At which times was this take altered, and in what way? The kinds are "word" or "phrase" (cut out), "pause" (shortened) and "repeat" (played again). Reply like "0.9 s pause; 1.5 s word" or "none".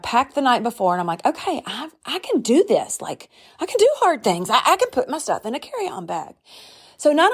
none